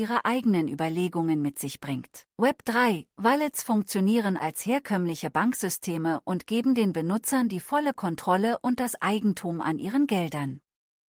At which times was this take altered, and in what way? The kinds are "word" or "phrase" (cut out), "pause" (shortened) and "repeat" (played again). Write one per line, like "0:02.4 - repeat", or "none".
0:02.3 - pause
0:04.4 - word